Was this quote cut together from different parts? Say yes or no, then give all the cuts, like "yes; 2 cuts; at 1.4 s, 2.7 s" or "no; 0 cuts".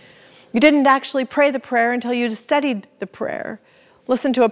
no; 0 cuts